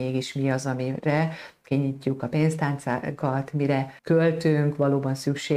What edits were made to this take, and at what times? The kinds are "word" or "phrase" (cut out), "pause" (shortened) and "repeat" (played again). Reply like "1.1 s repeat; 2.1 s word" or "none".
4.0 s pause